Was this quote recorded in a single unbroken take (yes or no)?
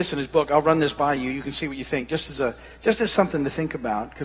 yes